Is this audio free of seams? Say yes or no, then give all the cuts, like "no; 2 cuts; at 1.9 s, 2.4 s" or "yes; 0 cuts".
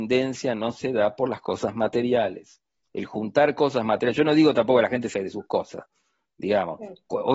no; 1 cut; at 5.1 s